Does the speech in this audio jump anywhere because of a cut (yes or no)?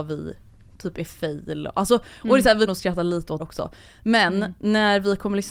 yes